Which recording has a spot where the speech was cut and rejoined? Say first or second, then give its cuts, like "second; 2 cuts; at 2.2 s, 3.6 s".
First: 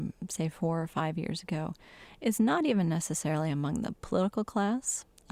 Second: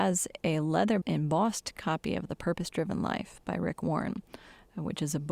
second; 1 cut; at 1.0 s